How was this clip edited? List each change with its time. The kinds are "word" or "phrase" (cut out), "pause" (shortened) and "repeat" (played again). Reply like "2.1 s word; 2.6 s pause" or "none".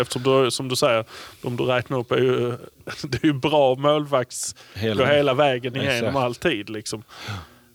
5.0 s word